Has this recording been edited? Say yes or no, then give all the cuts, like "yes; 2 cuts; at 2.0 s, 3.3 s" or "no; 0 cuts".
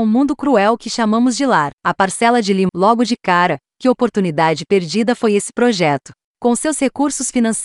yes; 2 cuts; at 1.7 s, 2.7 s